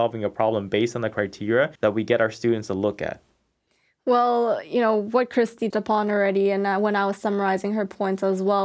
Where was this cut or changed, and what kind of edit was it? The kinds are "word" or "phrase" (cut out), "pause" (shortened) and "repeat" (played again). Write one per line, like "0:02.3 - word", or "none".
0:01.8 - pause
0:05.7 - word